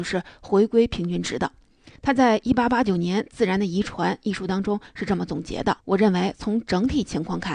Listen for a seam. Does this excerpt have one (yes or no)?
yes